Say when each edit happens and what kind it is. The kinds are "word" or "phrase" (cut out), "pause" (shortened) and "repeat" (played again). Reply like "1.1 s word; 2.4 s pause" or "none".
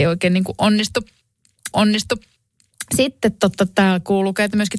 1.7 s repeat